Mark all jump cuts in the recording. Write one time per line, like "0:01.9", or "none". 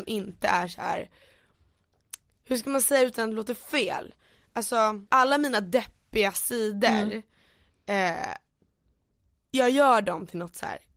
0:05.1